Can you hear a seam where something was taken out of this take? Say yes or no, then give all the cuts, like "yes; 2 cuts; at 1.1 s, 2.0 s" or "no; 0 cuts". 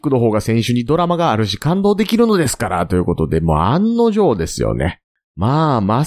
no; 0 cuts